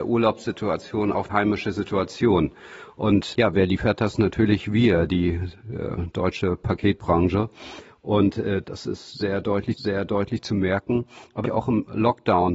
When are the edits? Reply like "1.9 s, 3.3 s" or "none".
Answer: 1.3 s, 3.3 s, 5.6 s, 8.6 s, 9.8 s, 11.4 s